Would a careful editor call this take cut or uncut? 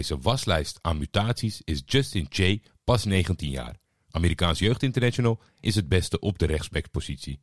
cut